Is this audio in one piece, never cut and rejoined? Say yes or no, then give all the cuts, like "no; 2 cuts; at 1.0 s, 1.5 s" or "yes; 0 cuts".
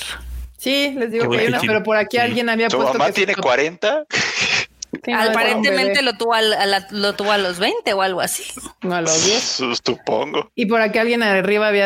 yes; 0 cuts